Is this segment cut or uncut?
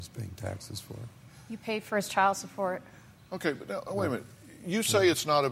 uncut